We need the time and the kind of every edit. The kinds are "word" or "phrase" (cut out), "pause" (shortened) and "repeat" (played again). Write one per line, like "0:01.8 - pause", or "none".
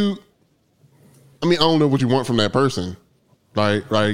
none